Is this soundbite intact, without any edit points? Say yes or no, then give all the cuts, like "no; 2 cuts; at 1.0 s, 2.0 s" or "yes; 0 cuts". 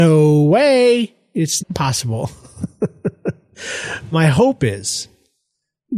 no; 2 cuts; at 1.6 s, 4.1 s